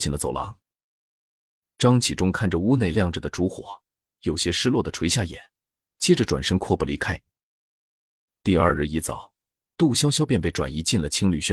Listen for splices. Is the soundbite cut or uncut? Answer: uncut